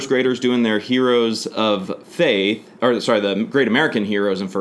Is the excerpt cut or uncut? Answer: uncut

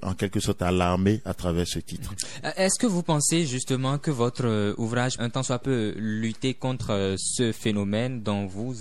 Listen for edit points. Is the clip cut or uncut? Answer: cut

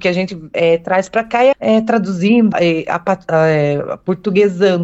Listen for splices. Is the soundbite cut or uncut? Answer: cut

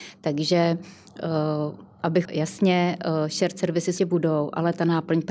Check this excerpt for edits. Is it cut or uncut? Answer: cut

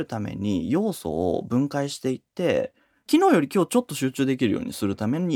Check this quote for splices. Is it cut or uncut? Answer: uncut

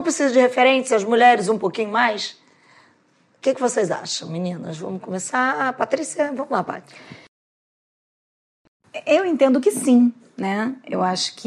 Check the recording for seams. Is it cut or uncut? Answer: uncut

